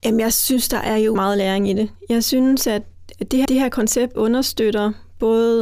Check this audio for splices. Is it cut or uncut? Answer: cut